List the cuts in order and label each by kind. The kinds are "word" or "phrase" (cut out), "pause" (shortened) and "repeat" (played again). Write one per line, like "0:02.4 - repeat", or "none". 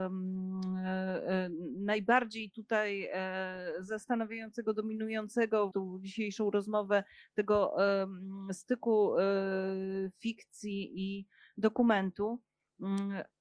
0:05.7 - word